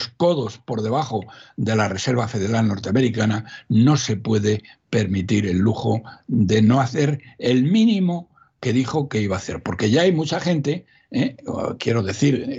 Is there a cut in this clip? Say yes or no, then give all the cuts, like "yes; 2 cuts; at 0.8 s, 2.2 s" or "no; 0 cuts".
no; 0 cuts